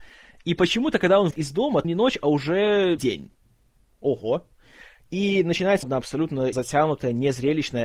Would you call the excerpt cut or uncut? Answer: cut